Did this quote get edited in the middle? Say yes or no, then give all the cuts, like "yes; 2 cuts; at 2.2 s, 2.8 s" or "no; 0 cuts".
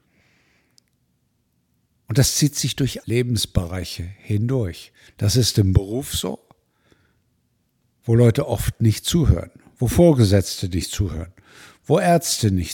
yes; 2 cuts; at 3.0 s, 5.1 s